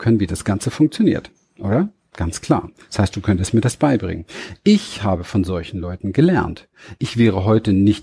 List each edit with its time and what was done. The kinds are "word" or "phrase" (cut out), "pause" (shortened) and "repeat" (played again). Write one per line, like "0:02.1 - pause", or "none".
none